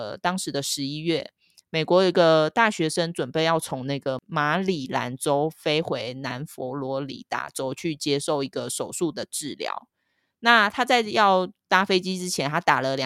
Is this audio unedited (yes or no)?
yes